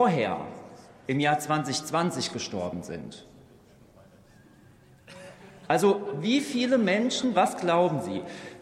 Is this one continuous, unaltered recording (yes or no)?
yes